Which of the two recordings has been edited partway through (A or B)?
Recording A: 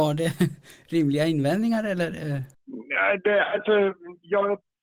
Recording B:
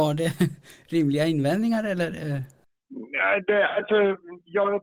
A